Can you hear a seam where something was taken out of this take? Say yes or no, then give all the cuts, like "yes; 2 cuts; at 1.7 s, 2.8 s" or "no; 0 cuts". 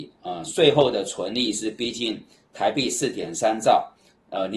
no; 0 cuts